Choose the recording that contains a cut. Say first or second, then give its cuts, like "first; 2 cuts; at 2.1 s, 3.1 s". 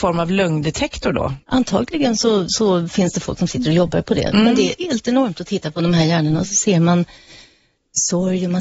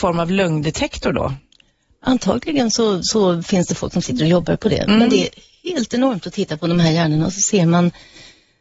first; 2 cuts; at 1.4 s, 4.8 s